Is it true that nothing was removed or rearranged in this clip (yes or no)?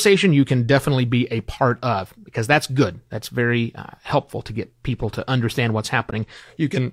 yes